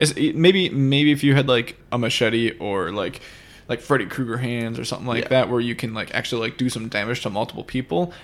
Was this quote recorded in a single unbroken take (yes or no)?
yes